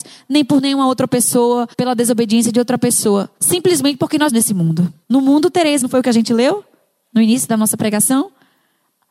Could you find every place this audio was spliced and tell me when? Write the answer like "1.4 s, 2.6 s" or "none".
1.7 s, 3.4 s, 4.3 s, 5.0 s, 5.8 s